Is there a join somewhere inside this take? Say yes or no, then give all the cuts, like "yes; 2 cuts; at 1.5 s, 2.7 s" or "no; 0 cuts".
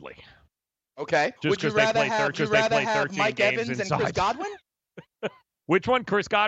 yes; 2 cuts; at 1.4 s, 2.3 s